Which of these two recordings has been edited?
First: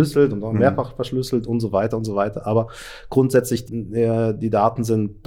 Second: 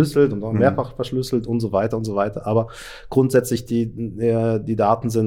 first; 1 cut; at 3.7 s

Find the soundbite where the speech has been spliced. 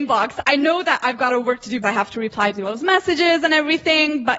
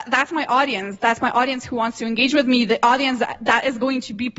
first; 3 cuts; at 1.3 s, 1.8 s, 2.6 s

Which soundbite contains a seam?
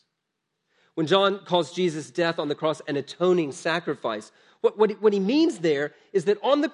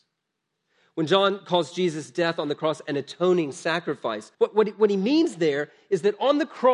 second; 1 cut; at 4.3 s

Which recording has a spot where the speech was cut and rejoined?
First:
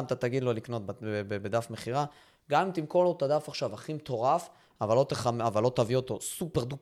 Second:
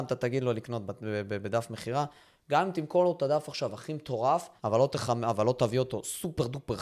second; 1 cut; at 4.6 s

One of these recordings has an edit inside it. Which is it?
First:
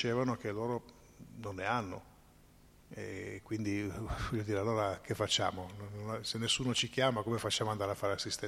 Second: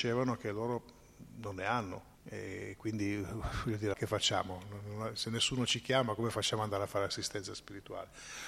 second; 2 cuts; at 2.1 s, 3.9 s

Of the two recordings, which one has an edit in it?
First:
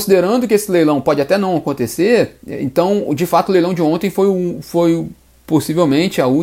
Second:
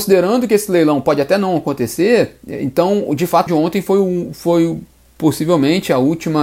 second; 1 cut; at 3.5 s

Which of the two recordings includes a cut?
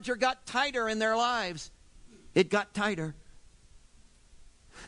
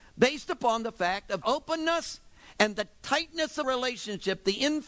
second; 2 cuts; at 1.4 s, 3.6 s

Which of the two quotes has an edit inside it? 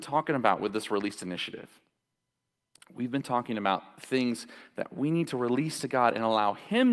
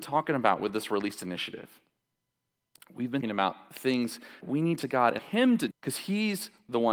second; 5 cuts; at 3.2 s, 4.4 s, 4.8 s, 5.2 s, 5.7 s

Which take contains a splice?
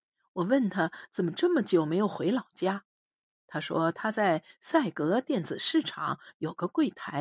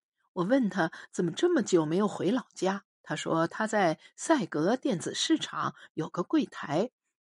second; 1 cut; at 2.9 s

